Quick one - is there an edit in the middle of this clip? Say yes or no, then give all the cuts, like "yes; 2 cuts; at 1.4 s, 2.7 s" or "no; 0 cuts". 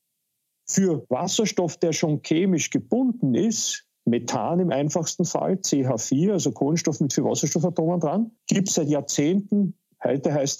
yes; 1 cut; at 8.4 s